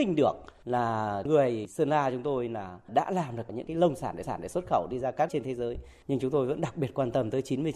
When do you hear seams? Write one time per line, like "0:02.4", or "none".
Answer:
0:04.2
0:05.3